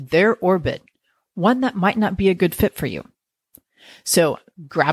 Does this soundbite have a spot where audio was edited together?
no; 0 cuts

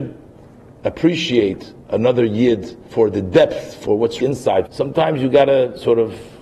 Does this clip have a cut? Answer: yes; 3 cuts; at 2.9 s, 4.2 s, 4.7 s

